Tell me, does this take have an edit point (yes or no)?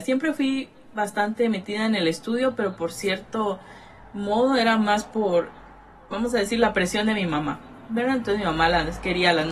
no